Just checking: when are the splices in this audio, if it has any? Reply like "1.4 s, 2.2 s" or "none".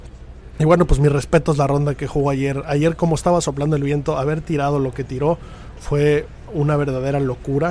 6.5 s

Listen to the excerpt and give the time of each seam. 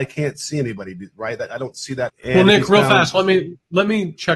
2.1 s

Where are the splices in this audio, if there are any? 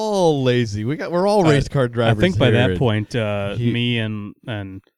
none

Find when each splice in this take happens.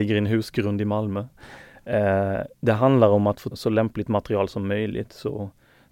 2.5 s, 3.5 s

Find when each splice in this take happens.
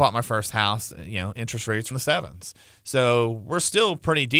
1.9 s

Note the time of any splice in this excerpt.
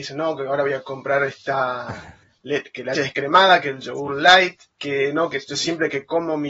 2.9 s, 4.7 s

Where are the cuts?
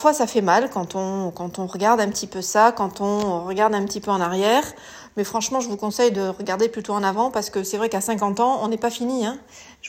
none

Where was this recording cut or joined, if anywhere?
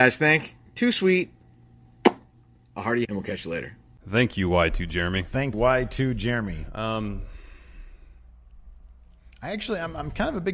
3.0 s, 5.5 s

